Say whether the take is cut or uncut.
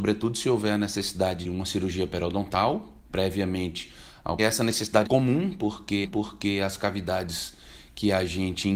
cut